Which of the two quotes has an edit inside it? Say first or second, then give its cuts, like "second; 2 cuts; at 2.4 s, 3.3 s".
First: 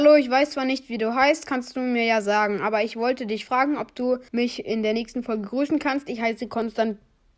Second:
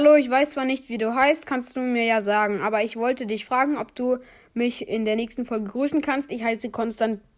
first; 1 cut; at 4.3 s